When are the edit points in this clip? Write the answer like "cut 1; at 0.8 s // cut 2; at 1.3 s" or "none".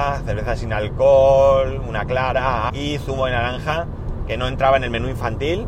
cut 1; at 2.7 s